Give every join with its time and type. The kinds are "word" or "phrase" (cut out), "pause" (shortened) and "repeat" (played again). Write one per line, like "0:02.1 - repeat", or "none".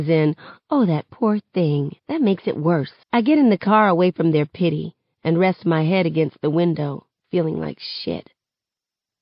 0:02.0 - pause
0:03.0 - pause